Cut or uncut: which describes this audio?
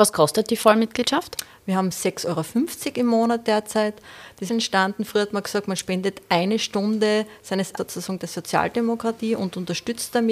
cut